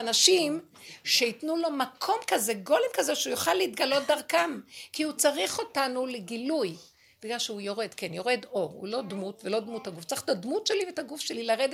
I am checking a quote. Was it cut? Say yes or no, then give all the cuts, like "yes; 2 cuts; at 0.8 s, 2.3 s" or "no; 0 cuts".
no; 0 cuts